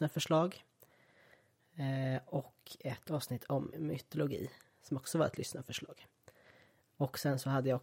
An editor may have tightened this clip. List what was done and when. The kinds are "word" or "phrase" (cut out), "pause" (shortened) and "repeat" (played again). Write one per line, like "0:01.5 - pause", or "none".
0:03.7 - word